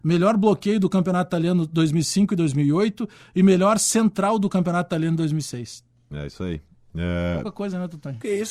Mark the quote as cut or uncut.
uncut